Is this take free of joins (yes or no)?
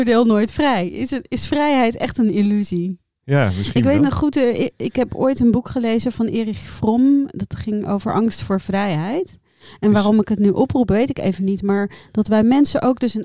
yes